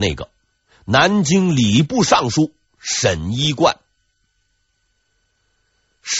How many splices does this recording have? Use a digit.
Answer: 0